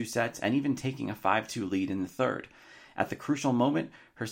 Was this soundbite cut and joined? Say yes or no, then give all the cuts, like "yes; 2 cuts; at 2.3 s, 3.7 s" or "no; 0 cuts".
no; 0 cuts